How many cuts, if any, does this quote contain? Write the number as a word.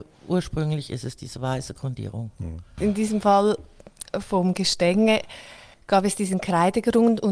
one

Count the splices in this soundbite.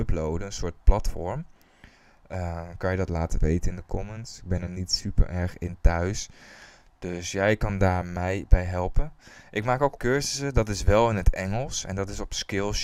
one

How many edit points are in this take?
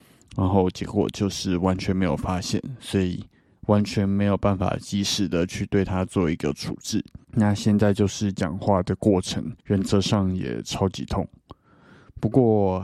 two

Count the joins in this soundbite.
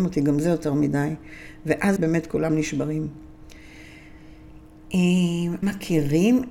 two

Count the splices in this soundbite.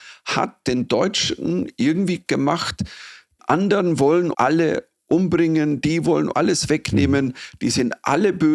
four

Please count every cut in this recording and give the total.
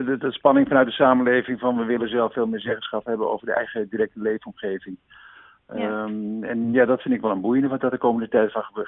zero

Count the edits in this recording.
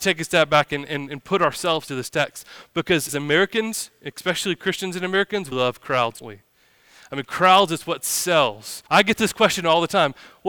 five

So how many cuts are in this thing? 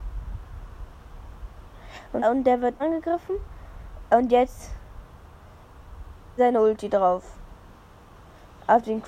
three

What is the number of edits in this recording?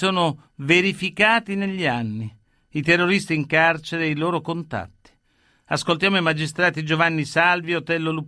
zero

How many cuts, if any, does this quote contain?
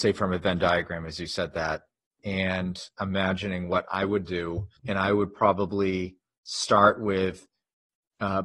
one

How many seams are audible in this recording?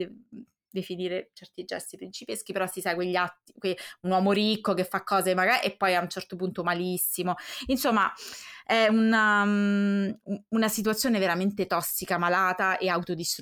zero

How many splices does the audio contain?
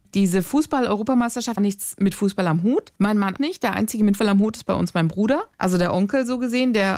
five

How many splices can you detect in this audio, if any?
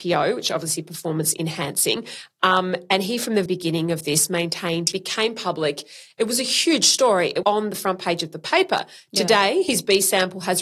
three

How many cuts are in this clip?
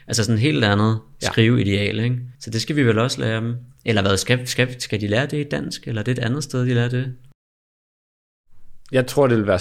one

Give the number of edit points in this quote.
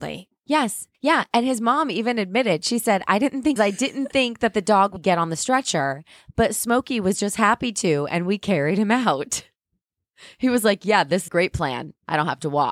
four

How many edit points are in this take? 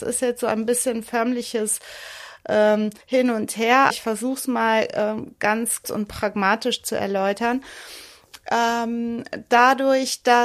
three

